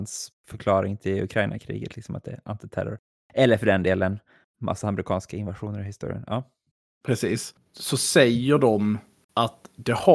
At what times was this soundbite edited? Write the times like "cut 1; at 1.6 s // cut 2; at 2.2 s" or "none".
none